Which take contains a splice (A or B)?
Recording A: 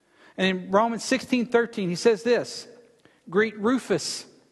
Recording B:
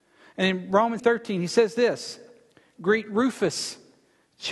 B